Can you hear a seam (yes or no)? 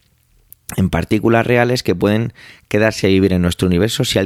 no